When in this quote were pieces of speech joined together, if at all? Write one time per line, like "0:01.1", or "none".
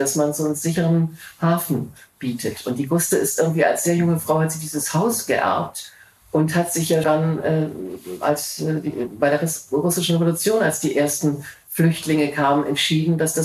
0:07.0